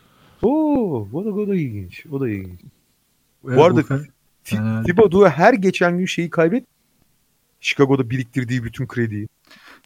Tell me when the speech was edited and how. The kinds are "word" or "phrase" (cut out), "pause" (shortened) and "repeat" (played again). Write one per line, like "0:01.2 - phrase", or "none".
none